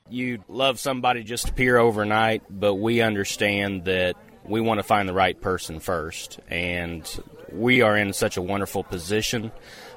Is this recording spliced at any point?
no; 0 cuts

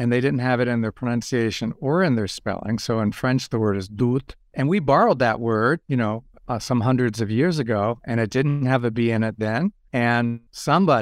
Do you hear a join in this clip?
no; 0 cuts

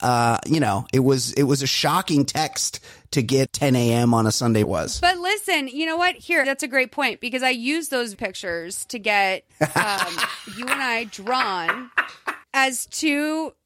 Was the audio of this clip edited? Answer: yes; 6 cuts; at 3.5 s, 4.6 s, 6.4 s, 8.1 s, 9.5 s, 12.4 s

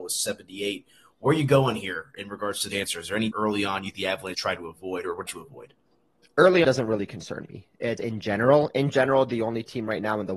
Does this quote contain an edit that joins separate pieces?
yes; 7 cuts; at 2.7 s, 3.3 s, 3.9 s, 4.3 s, 5.3 s, 6.6 s, 8.0 s

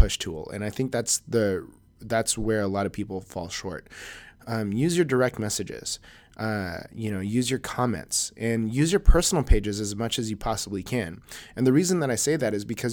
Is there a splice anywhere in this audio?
no; 0 cuts

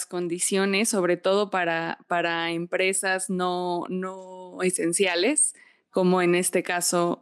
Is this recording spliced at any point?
no; 0 cuts

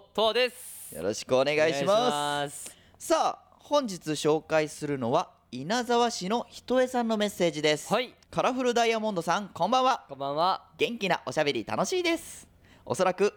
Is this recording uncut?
no; 1 cut; at 8.2 s

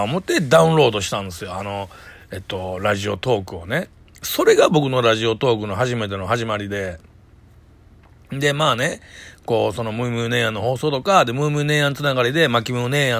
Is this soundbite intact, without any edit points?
yes; 0 cuts

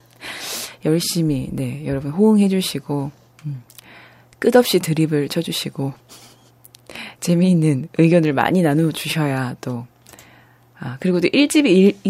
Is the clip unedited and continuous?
yes; 0 cuts

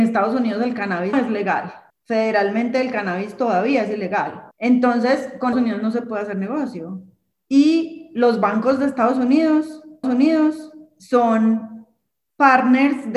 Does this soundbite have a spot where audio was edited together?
yes; 6 cuts; at 1.1 s, 1.9 s, 4.5 s, 5.5 s, 7.3 s, 10.0 s

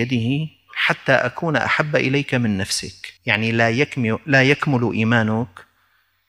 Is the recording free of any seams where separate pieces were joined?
no; 1 cut; at 3.2 s

